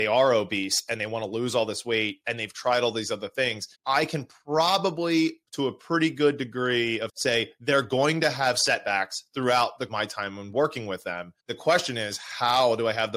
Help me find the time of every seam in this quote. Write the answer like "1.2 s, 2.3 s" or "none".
3.7 s, 5.5 s, 7.1 s, 9.9 s, 11.4 s